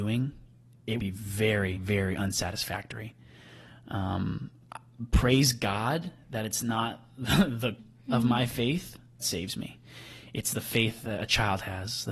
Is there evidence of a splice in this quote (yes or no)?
yes